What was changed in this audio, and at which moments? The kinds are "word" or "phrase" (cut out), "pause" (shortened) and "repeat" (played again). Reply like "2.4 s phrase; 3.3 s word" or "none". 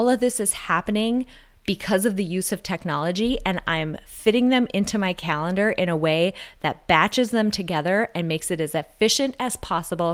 none